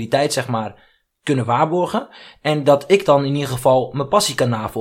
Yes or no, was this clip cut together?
no